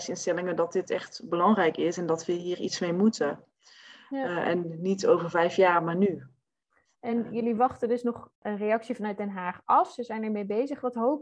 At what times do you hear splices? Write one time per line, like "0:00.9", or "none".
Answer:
none